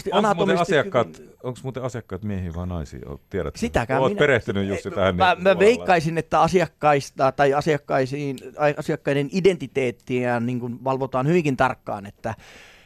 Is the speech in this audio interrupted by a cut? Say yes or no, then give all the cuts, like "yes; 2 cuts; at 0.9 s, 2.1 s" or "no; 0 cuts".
no; 0 cuts